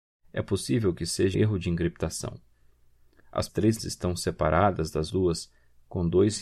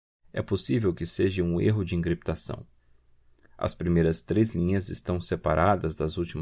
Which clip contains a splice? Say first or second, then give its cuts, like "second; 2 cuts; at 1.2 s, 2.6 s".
first; 4 cuts; at 1.3 s, 3.5 s, 3.8 s, 5.1 s